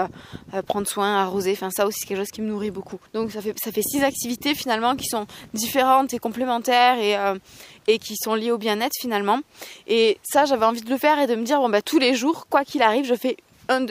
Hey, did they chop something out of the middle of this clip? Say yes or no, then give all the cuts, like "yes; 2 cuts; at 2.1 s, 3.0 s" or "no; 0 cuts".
yes; 1 cut; at 3.1 s